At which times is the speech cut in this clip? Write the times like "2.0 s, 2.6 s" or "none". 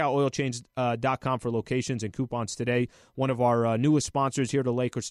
none